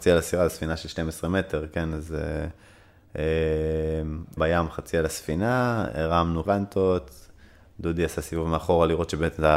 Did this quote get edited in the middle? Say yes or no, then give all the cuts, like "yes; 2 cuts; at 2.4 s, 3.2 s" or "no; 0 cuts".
yes; 2 cuts; at 4.4 s, 6.4 s